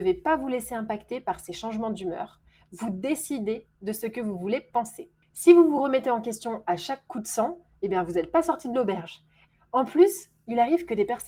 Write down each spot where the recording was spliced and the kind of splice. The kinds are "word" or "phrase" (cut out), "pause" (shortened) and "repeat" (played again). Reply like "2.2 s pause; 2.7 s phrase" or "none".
none